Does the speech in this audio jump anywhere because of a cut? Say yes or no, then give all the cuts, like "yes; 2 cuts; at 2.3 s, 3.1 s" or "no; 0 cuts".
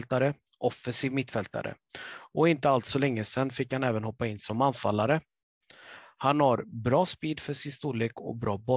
no; 0 cuts